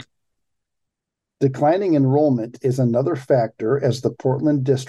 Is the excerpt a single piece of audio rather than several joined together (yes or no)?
yes